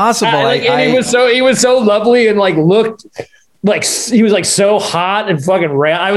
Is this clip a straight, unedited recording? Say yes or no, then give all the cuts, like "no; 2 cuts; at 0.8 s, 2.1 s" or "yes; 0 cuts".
yes; 0 cuts